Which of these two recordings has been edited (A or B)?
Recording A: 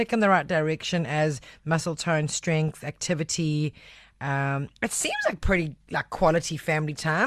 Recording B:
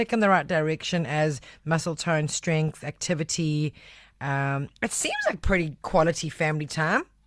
B